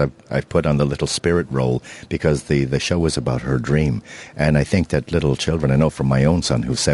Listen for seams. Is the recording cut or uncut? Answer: uncut